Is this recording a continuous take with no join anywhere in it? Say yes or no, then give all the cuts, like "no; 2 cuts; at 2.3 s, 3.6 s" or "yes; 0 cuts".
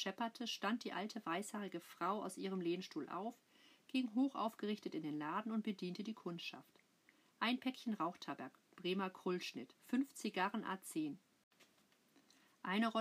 no; 1 cut; at 9.8 s